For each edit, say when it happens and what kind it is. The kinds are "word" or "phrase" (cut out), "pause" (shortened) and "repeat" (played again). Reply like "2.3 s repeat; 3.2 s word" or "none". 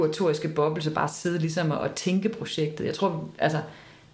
1.7 s word